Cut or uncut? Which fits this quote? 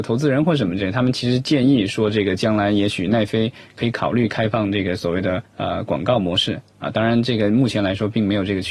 cut